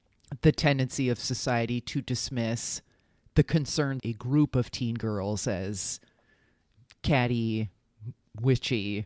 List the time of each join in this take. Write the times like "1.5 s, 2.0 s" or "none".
4.0 s